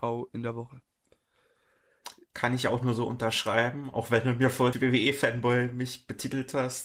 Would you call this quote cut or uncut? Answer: cut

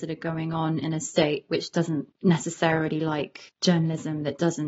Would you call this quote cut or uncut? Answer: cut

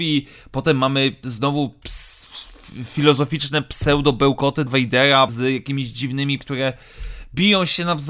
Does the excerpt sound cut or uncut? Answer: cut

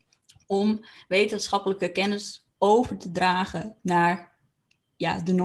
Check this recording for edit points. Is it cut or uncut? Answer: uncut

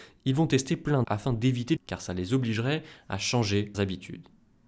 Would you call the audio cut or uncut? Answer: cut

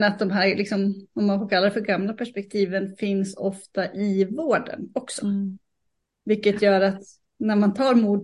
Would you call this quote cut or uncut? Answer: uncut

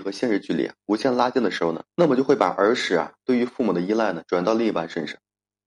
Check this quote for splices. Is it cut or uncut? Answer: cut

